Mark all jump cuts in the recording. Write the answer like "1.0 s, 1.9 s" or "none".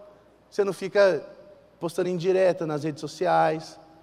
none